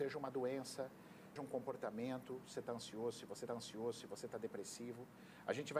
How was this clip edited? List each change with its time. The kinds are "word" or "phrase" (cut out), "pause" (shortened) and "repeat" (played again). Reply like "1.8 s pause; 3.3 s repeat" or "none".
1.4 s word; 2.5 s word; 3.5 s repeat